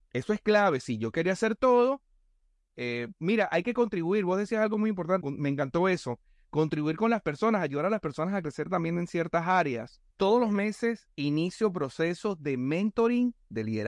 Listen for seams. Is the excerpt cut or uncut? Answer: cut